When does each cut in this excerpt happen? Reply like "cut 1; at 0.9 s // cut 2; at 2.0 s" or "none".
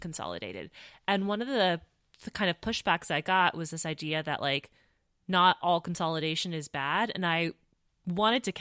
none